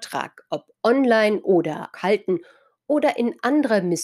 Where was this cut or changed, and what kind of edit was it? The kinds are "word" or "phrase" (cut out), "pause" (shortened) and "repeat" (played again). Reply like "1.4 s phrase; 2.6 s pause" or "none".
1.9 s word